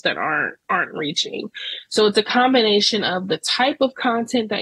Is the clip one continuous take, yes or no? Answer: yes